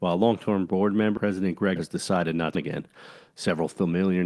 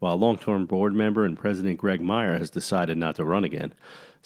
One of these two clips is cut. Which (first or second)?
first